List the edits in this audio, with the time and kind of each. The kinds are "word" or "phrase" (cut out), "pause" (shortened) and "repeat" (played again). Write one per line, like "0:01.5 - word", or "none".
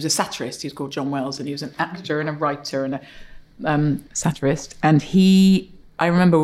0:04.1 - pause